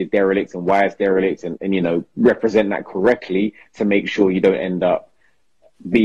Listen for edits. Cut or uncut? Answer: cut